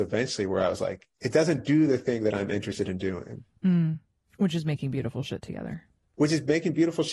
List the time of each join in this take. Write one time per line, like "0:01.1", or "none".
none